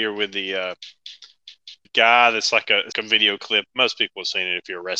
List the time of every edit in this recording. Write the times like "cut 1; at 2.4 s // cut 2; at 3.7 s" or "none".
cut 1; at 1.8 s // cut 2; at 2.9 s